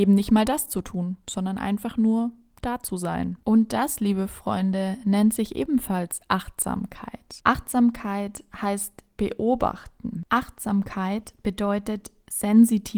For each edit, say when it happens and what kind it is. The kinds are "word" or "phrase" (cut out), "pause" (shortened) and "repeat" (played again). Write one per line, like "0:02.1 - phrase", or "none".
none

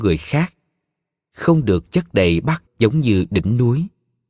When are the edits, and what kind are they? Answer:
0:02.7 - word

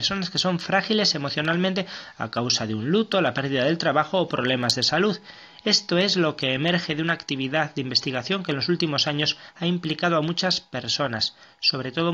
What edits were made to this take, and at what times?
none

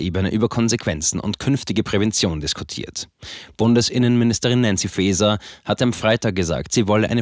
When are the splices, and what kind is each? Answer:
none

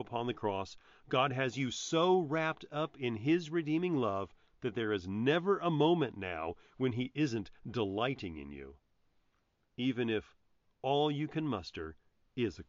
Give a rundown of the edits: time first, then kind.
none

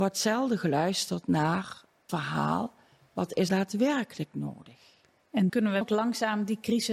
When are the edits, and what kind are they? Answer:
0:02.1 - word
0:03.5 - word
0:05.5 - word
0:05.8 - word

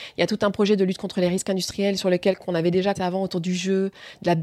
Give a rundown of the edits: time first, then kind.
0:03.0 - word

